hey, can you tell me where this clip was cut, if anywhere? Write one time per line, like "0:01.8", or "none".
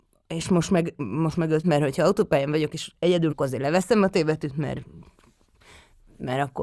0:01.6
0:03.3